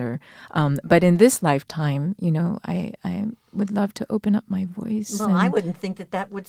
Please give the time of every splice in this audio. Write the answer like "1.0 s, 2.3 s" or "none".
none